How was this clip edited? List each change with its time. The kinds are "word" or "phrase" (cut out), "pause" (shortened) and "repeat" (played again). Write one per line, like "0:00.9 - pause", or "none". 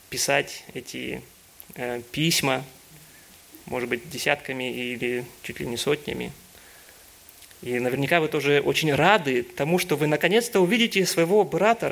0:03.6 - pause